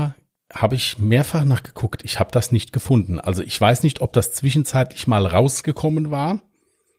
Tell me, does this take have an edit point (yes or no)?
no